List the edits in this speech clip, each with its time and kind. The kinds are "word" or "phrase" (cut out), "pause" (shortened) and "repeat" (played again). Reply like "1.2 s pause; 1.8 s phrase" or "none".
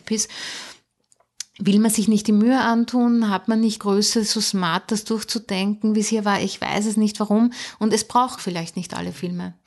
3.8 s word; 8.4 s word